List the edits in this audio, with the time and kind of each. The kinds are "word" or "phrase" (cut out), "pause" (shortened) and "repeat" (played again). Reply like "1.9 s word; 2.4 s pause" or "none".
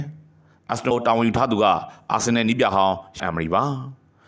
0.9 s word; 3.2 s word